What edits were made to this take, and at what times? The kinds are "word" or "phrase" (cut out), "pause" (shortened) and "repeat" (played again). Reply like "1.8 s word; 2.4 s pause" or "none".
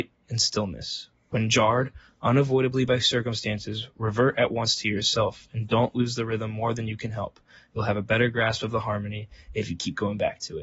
none